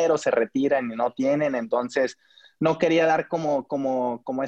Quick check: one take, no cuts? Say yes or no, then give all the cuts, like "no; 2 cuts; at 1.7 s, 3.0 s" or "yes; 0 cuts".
yes; 0 cuts